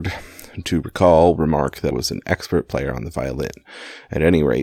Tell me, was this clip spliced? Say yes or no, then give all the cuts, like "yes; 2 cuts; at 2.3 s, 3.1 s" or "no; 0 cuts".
yes; 2 cuts; at 1.4 s, 1.9 s